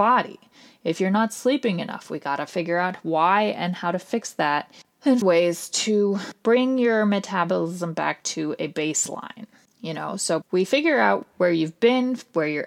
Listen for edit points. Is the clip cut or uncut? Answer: cut